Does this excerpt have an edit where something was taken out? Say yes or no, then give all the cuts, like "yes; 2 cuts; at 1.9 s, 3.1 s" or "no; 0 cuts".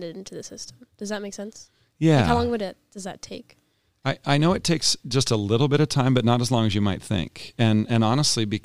no; 0 cuts